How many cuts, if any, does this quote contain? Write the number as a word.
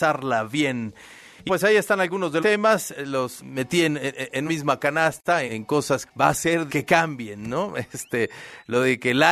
seven